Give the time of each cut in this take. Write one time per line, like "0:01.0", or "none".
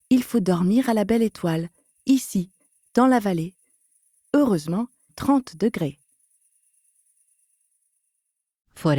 0:05.1